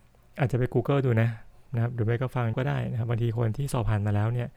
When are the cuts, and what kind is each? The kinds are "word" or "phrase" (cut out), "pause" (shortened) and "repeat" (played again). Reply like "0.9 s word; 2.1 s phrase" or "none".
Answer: 2.5 s word